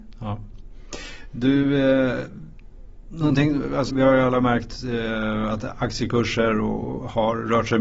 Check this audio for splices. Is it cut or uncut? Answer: cut